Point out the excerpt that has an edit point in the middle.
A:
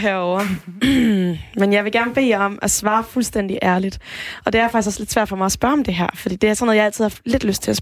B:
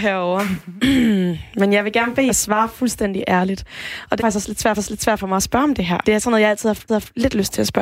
B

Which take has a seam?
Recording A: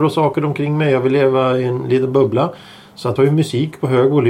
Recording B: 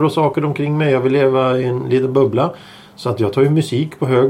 A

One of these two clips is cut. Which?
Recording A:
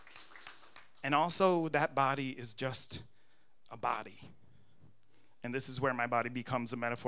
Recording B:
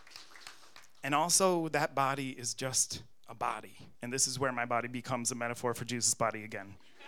B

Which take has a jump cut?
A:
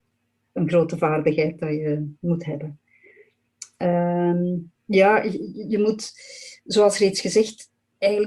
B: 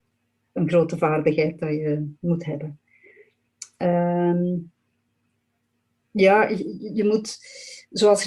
A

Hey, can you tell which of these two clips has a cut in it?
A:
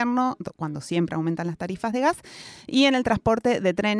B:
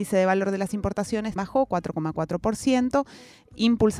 B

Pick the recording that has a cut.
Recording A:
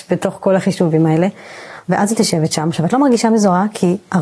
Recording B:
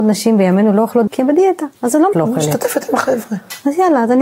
B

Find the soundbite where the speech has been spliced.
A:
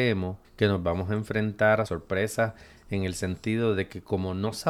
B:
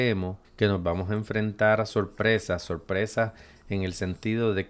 A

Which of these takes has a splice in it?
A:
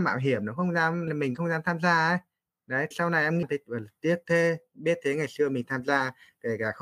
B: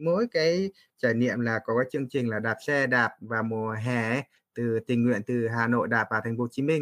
A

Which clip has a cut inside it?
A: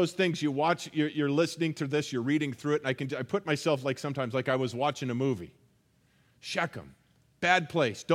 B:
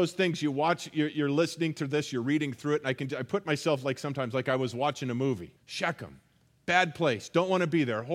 B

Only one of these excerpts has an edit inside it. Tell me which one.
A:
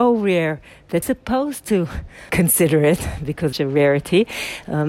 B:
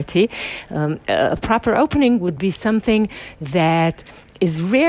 A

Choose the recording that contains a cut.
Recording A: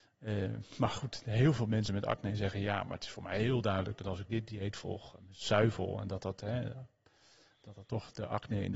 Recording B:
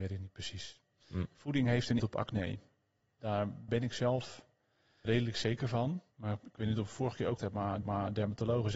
B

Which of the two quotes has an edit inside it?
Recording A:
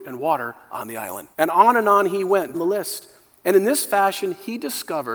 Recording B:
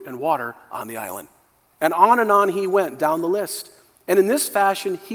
A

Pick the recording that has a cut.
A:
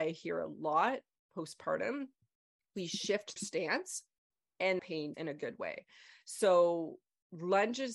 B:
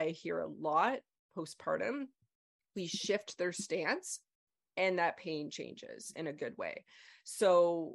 A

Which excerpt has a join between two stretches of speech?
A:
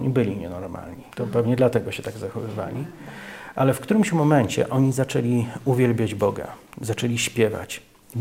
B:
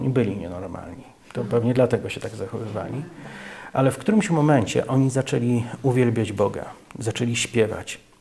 A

